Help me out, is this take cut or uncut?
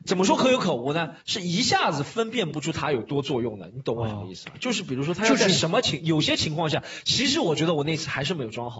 cut